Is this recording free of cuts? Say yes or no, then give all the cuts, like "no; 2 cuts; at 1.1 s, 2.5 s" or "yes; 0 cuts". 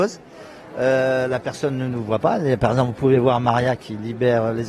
yes; 0 cuts